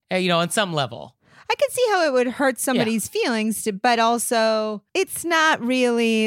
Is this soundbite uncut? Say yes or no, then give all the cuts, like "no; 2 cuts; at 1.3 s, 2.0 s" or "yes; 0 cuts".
yes; 0 cuts